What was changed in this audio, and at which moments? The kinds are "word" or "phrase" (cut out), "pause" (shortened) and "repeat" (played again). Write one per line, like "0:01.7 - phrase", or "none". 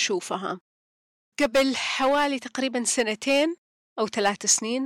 none